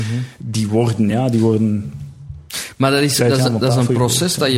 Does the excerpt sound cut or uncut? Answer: uncut